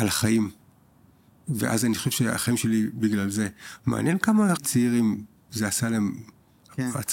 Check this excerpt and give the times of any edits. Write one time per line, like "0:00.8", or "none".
0:04.6